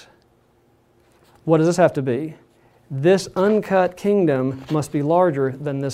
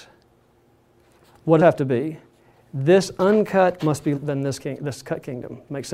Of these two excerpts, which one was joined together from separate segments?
second; 4 cuts; at 1.6 s, 3.8 s, 4.1 s, 4.6 s

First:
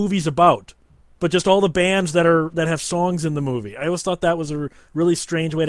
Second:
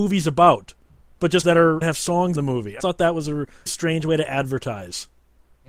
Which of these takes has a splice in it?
second; 5 cuts; at 1.4 s, 1.8 s, 2.3 s, 2.8 s, 3.7 s

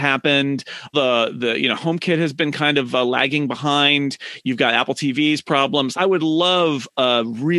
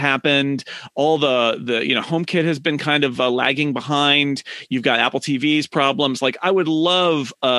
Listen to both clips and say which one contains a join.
first; 2 cuts; at 0.9 s, 5.9 s

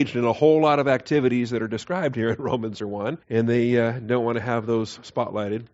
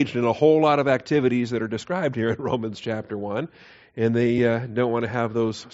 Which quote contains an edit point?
first; 2 cuts; at 2.8 s, 3.2 s

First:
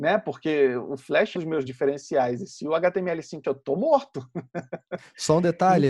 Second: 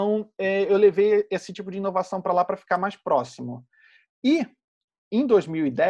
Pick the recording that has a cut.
first; 3 cuts; at 1.3 s, 1.7 s, 3.4 s

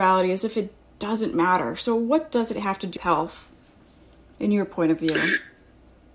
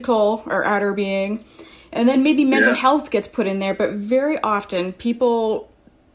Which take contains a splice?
first; 1 cut; at 3.0 s

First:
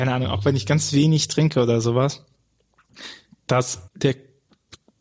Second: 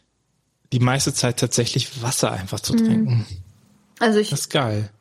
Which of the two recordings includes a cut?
first; 1 cut; at 3.9 s

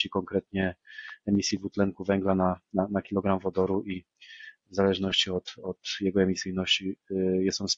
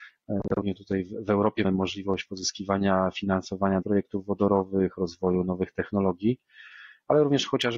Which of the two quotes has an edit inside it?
second; 2 cuts; at 1.6 s, 3.8 s

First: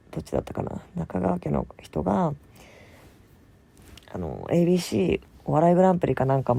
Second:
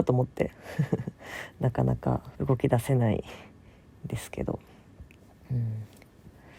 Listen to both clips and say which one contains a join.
second; 1 cut; at 2.3 s

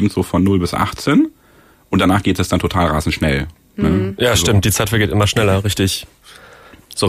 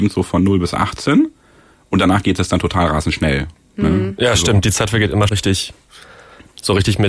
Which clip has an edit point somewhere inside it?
second; 1 cut; at 5.3 s

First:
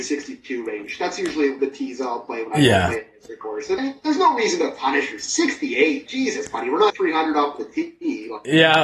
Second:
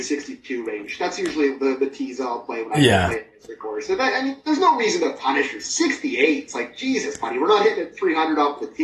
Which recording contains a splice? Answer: first; 4 cuts; at 1.6 s, 3.8 s, 6.1 s, 6.9 s

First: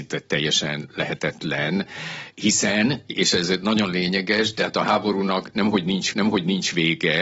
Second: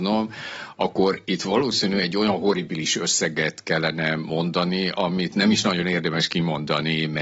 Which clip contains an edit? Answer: first; 1 cut; at 6.1 s

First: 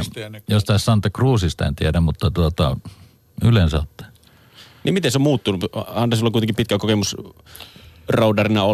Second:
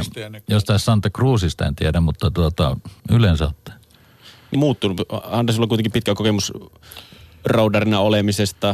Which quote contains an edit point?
second; 2 cuts; at 3.0 s, 4.5 s

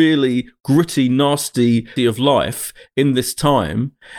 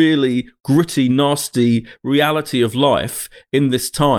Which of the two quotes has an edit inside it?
first; 1 cut; at 2.0 s

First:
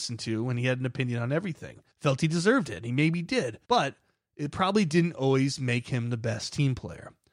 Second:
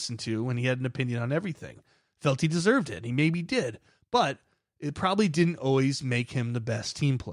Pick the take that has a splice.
first; 2 cuts; at 1.9 s, 3.6 s

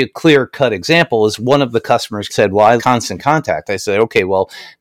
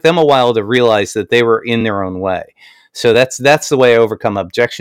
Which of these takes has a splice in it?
first; 2 cuts; at 2.3 s, 2.8 s

